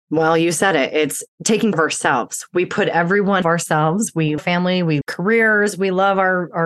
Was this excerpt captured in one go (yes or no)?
no